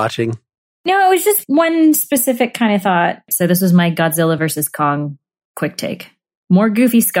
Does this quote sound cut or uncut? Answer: uncut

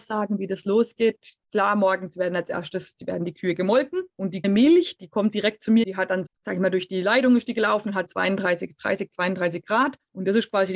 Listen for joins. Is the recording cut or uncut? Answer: cut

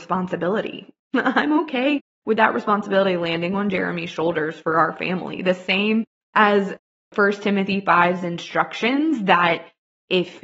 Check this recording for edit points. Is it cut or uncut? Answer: uncut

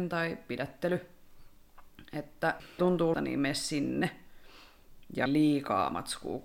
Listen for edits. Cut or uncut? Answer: cut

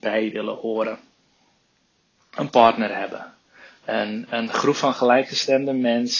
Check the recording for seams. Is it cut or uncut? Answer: uncut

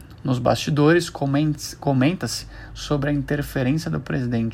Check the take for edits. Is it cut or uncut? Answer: uncut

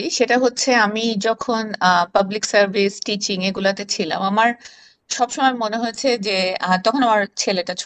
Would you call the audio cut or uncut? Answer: uncut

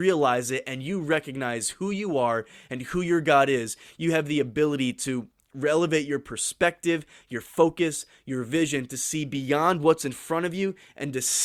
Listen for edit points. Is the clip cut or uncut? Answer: uncut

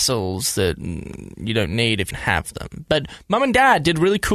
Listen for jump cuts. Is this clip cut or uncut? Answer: cut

